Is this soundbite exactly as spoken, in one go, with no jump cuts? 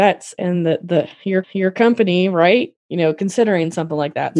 no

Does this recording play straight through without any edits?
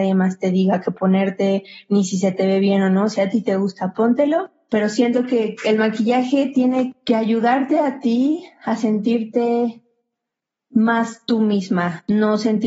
yes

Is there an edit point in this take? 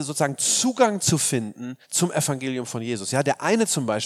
yes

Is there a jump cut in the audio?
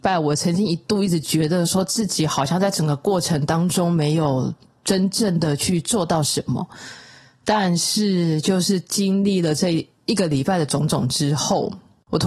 no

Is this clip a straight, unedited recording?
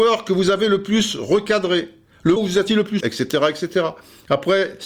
no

